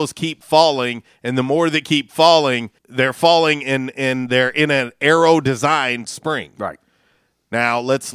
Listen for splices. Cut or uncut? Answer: cut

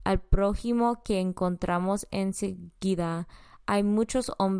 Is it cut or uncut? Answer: uncut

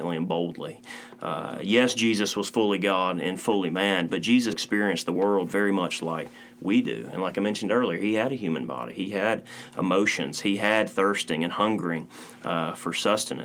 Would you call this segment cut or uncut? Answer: cut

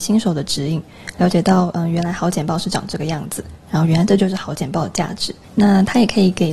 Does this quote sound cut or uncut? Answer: cut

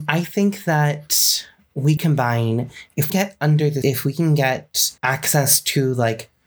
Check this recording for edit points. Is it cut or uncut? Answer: cut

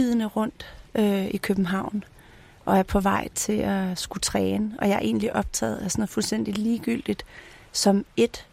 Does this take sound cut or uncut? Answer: uncut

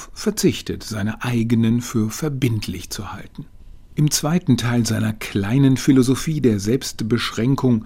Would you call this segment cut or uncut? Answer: uncut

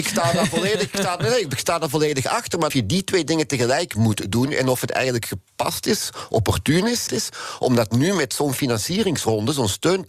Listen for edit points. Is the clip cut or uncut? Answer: cut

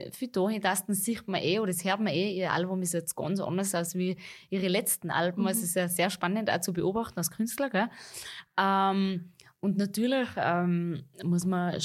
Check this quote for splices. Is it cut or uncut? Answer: uncut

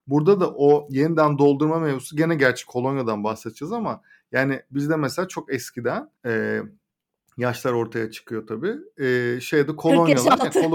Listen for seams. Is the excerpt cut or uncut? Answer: cut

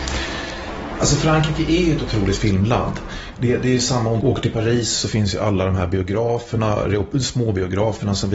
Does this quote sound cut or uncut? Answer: cut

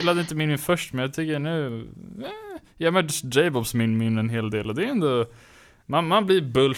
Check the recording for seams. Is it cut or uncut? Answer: uncut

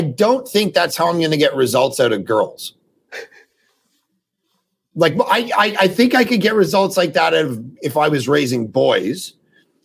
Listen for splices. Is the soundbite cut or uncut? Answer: uncut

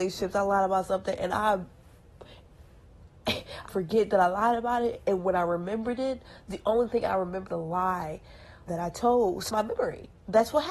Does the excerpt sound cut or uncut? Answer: cut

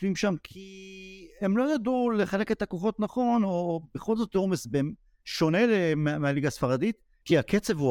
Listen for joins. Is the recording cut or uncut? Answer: uncut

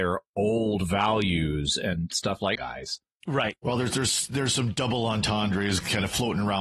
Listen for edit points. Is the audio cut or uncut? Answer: cut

